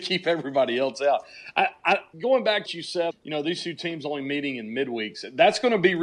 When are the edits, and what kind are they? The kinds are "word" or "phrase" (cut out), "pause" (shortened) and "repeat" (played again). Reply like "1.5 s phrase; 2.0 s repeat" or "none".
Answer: 2.1 s word; 2.7 s word; 3.1 s word